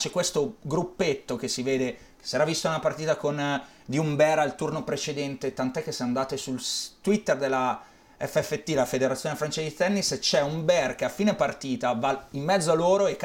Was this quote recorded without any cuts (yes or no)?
yes